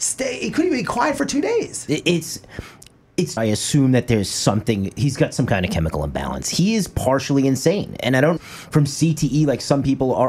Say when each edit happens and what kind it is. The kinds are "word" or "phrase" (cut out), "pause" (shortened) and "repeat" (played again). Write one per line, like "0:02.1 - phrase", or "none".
0:03.4 - phrase
0:08.4 - phrase